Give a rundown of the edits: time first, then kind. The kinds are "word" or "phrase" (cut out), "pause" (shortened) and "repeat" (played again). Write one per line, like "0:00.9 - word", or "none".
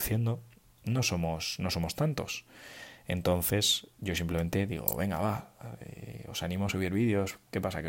none